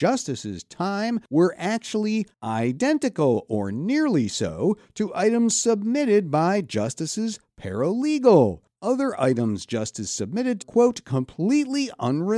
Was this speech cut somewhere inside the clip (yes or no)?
yes